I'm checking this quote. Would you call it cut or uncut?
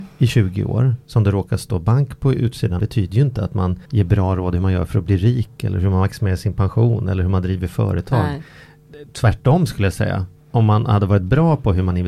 cut